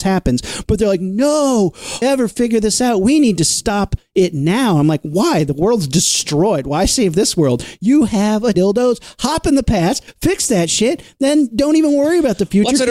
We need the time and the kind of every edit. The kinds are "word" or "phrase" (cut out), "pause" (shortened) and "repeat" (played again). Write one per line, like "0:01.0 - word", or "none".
0:02.0 - phrase
0:08.5 - phrase